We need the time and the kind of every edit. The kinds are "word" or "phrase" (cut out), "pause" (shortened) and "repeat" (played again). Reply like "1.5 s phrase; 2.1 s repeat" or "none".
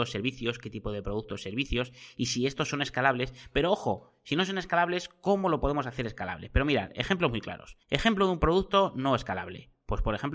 7.8 s pause

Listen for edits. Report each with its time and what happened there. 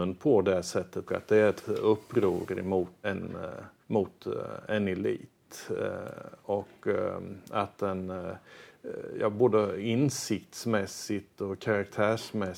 1.1 s phrase; 1.6 s word; 3.0 s word; 3.8 s pause

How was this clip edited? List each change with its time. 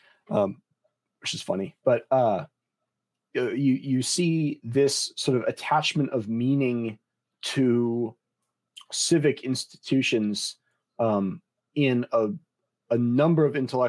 none

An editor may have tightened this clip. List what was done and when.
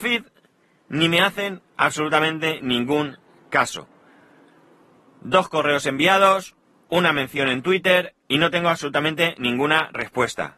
none

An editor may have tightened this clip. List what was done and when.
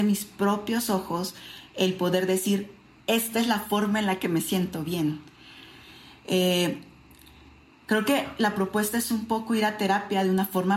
none

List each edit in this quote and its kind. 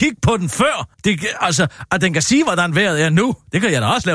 0.9 s pause

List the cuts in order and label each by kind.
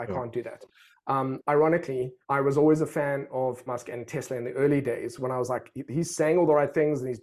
2.2 s pause; 3.7 s word

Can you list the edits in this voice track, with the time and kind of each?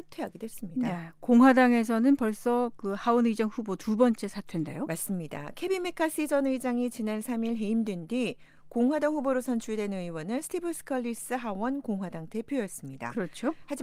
none

